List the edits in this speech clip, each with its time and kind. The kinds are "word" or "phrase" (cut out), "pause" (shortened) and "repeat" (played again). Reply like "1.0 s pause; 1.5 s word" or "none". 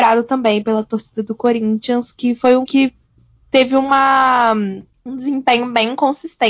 2.7 s word; 4.9 s pause